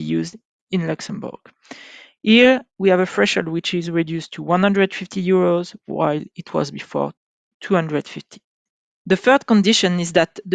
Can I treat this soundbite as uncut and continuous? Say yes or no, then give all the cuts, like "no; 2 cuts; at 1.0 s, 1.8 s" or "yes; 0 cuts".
yes; 0 cuts